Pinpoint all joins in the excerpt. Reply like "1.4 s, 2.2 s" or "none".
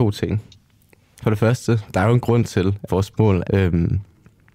2.9 s, 3.4 s